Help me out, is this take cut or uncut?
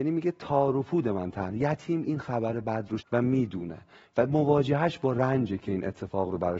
cut